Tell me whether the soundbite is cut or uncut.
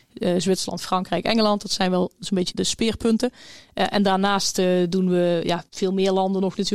cut